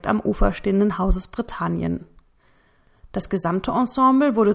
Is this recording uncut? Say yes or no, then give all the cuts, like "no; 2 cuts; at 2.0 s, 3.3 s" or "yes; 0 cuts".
yes; 0 cuts